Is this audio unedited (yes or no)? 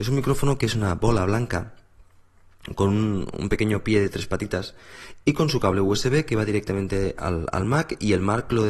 yes